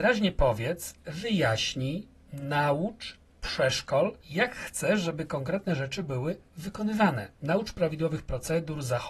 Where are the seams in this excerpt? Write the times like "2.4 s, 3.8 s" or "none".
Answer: 4.2 s, 7.4 s